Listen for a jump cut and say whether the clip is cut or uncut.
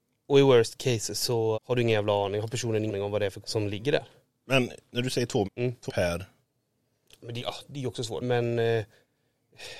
cut